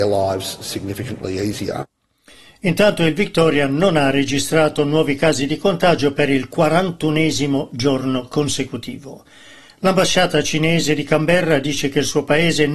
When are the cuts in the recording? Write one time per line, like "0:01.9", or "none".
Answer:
none